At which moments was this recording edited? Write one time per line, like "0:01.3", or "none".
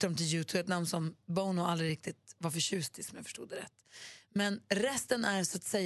none